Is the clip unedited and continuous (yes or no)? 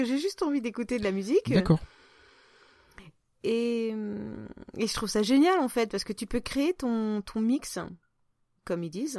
yes